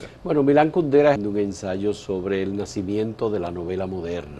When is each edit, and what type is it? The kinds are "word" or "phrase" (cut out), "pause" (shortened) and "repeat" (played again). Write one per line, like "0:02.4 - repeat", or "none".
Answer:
0:01.2 - phrase